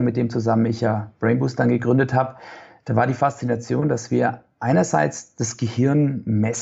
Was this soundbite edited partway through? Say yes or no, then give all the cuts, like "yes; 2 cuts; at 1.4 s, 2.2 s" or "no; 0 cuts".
no; 0 cuts